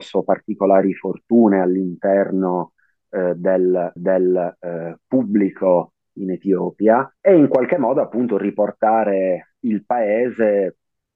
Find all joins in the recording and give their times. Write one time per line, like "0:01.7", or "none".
0:04.0
0:06.0
0:07.2